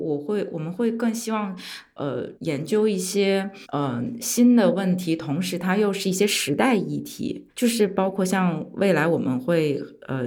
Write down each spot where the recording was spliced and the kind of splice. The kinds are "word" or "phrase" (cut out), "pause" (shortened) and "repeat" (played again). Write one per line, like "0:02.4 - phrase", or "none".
0:02.4 - pause
0:03.6 - pause
0:07.5 - pause